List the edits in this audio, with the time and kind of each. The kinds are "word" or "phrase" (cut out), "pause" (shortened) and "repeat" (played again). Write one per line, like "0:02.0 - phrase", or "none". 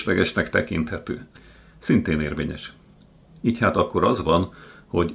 none